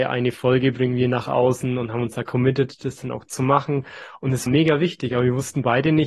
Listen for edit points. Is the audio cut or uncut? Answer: cut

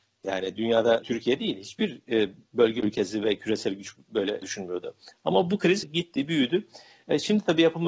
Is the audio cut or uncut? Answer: cut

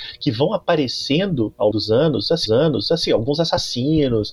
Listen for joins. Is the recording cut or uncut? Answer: cut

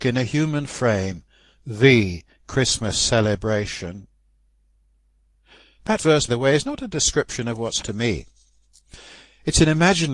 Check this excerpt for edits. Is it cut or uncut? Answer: cut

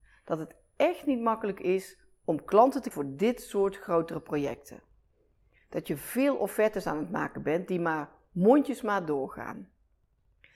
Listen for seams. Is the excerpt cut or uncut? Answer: cut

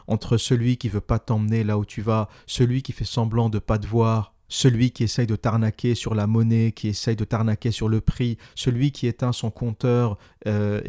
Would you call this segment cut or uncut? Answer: uncut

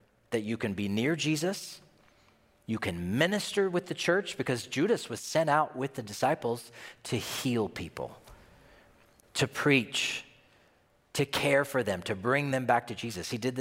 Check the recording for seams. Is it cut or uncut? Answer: uncut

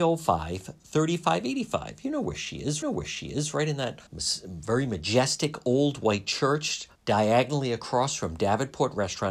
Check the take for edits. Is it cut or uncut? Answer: cut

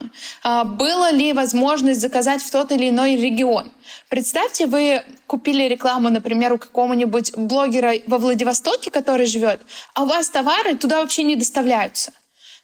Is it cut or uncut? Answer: uncut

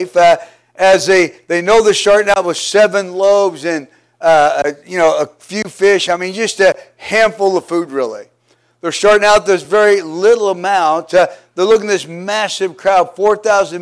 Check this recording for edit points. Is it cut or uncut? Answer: uncut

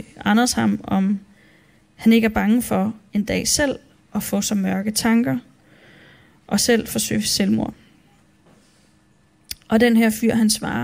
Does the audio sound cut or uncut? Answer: uncut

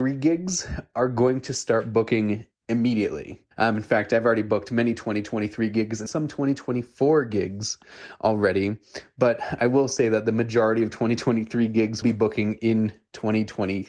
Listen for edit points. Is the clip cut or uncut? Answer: cut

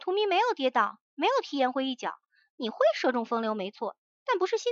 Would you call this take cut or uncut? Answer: uncut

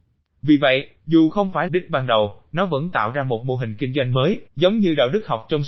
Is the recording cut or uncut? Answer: cut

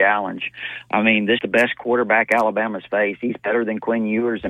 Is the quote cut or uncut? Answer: cut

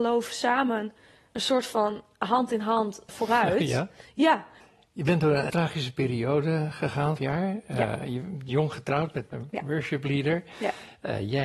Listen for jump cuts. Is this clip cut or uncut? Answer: cut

